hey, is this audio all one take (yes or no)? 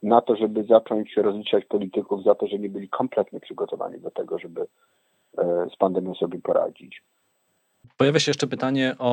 yes